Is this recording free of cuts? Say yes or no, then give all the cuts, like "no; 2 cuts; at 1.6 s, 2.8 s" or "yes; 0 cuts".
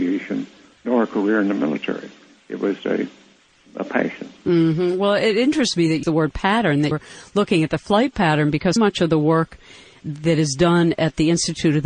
no; 4 cuts; at 2.8 s, 6.0 s, 6.9 s, 8.8 s